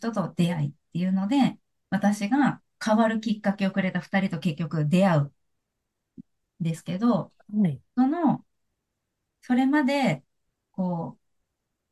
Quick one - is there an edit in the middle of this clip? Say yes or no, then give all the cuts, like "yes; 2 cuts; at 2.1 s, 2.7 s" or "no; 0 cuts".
no; 0 cuts